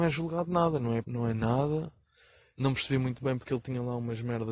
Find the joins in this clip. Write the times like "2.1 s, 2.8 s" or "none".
1.0 s